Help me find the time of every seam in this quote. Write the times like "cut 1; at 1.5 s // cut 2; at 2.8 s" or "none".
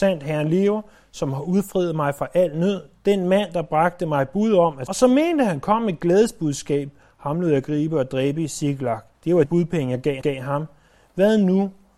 cut 1; at 4.9 s // cut 2; at 9.1 s // cut 3; at 9.5 s // cut 4; at 10.2 s